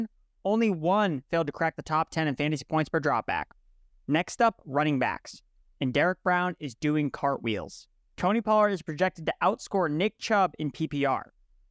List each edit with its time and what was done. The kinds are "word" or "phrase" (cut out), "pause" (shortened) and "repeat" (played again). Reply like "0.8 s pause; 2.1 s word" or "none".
none